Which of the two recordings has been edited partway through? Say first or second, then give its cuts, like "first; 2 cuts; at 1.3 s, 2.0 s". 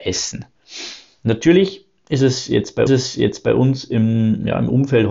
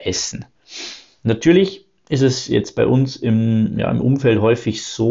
first; 1 cut; at 2.9 s